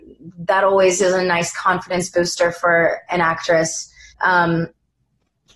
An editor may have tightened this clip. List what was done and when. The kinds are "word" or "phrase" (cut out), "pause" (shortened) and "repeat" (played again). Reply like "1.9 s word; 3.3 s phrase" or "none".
4.1 s pause